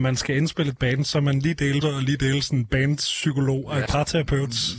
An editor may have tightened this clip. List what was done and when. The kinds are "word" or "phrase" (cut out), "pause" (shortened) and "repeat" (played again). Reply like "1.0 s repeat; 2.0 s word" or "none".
1.8 s word; 3.9 s word